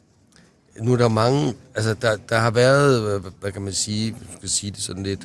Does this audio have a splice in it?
no; 0 cuts

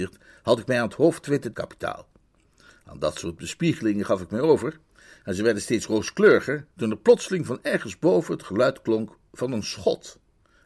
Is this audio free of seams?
no; 2 cuts; at 1.5 s, 6.7 s

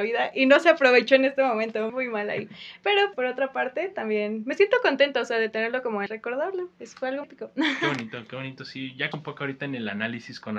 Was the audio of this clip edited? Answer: yes; 6 cuts; at 1.9 s, 3.1 s, 6.1 s, 6.7 s, 7.2 s, 9.1 s

